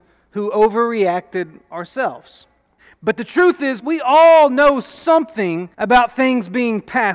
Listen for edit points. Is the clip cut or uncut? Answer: cut